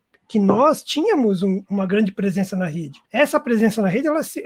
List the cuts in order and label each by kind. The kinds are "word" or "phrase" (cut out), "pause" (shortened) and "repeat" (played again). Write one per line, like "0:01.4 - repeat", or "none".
0:03.1 - pause